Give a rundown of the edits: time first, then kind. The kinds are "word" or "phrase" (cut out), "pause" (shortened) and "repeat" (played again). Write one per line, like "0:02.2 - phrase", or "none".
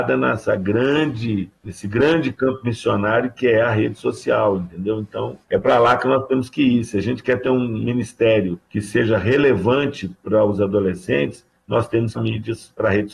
0:01.6 - pause
0:05.4 - pause
0:08.7 - pause
0:12.1 - phrase